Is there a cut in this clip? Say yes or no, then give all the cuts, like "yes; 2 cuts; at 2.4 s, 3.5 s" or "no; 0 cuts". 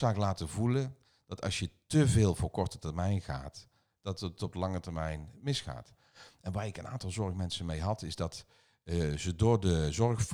no; 0 cuts